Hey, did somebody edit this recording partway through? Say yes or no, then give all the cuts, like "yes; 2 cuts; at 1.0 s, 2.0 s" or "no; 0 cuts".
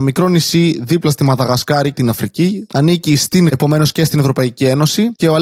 yes; 2 cuts; at 1.9 s, 3.5 s